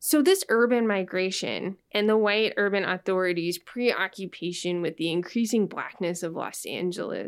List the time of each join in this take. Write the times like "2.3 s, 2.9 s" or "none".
none